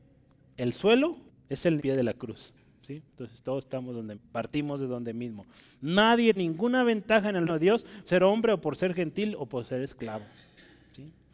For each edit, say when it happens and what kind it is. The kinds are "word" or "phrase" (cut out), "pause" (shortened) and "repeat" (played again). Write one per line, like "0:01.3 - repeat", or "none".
0:01.3 - pause
0:01.8 - phrase
0:03.1 - pause
0:04.1 - word
0:06.4 - word
0:07.5 - word
0:08.1 - word